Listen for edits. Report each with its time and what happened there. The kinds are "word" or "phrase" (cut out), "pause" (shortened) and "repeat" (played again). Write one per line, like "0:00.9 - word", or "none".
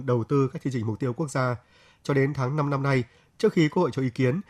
none